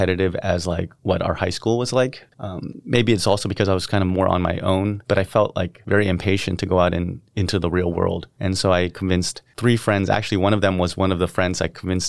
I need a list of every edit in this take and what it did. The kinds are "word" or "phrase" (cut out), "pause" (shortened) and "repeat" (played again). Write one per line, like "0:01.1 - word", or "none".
none